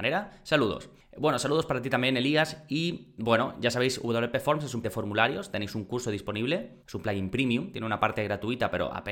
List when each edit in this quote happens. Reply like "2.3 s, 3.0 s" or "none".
3.2 s, 4.8 s, 6.8 s